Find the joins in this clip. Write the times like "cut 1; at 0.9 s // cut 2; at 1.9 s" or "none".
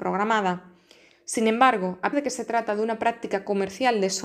cut 1; at 2.1 s